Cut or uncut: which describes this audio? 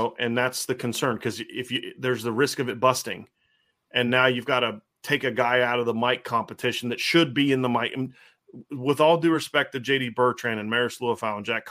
uncut